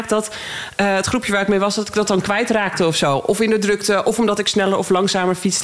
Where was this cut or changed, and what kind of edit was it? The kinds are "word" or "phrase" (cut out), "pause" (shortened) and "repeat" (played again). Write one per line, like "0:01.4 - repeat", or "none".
none